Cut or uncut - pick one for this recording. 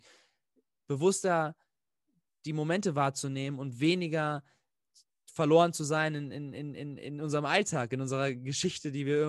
uncut